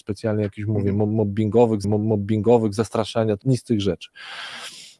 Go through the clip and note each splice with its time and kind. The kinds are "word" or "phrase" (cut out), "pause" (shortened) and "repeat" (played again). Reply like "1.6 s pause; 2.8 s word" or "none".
1.8 s repeat; 3.4 s word